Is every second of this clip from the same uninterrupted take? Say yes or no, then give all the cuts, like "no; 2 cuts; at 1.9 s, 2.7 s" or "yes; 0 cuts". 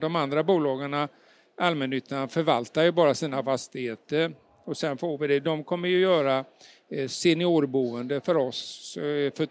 yes; 0 cuts